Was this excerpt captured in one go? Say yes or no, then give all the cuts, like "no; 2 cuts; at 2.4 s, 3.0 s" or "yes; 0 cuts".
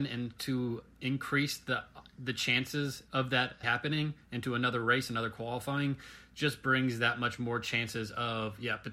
no; 2 cuts; at 3.1 s, 3.6 s